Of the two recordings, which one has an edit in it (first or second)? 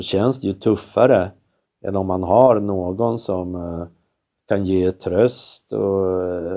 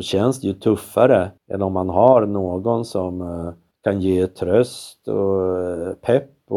second